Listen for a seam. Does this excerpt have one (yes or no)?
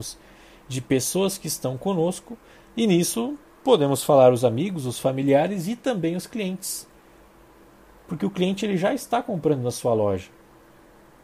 no